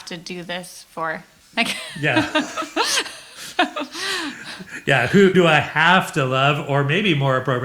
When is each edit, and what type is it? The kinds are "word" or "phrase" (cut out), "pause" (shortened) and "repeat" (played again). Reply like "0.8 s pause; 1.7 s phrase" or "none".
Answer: 5.3 s word